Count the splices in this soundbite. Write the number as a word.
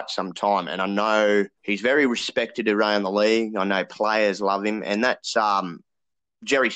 one